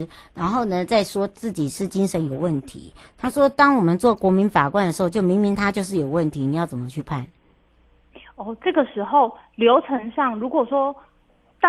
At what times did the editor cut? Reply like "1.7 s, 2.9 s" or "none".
none